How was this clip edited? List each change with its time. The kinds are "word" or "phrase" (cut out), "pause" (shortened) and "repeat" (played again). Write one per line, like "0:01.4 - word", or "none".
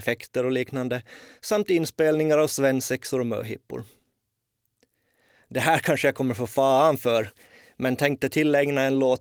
none